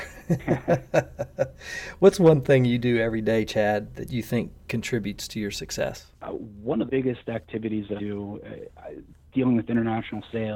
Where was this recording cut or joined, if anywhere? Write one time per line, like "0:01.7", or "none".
0:06.1
0:06.9
0:08.0